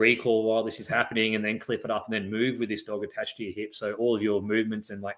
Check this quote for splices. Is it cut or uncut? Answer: uncut